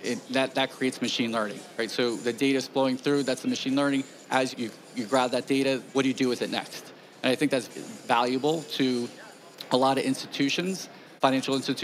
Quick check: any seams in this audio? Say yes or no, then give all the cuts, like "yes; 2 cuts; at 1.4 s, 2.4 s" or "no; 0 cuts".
yes; 3 cuts; at 4.5 s, 5.9 s, 7.7 s